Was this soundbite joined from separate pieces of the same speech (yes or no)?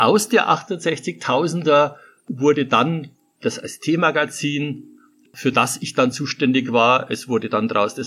no